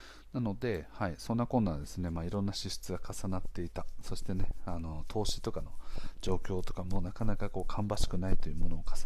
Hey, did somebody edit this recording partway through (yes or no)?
no